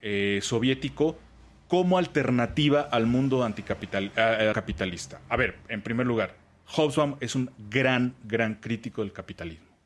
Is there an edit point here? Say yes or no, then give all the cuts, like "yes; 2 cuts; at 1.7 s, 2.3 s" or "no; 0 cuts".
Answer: yes; 2 cuts; at 4.5 s, 8.2 s